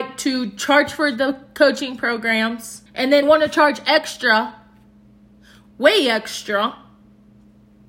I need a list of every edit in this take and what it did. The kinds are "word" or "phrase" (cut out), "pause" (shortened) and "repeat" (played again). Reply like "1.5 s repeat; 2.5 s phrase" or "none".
2.9 s pause; 3.2 s word